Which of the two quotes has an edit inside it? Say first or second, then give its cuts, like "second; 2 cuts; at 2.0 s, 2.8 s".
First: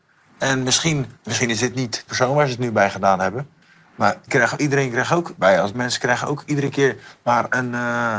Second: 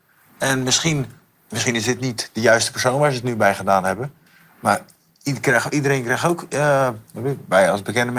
first; 5 cuts; at 1.2 s, 2.1 s, 4.3 s, 5.4 s, 5.7 s